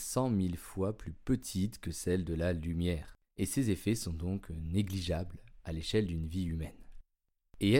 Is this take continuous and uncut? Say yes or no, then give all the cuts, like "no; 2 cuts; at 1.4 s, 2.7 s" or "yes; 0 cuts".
yes; 0 cuts